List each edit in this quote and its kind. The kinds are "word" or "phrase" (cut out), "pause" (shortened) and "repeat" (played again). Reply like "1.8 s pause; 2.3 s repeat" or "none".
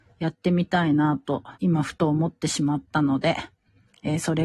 1.5 s pause